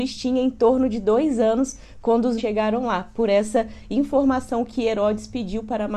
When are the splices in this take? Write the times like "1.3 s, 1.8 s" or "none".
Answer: 2.4 s